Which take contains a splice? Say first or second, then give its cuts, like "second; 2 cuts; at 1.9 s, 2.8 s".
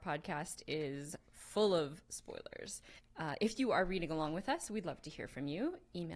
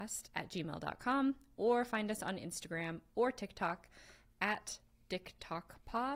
first; 1 cut; at 3.0 s